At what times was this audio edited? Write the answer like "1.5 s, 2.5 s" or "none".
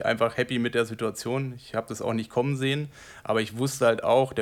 none